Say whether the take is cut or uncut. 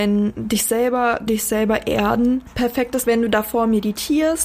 cut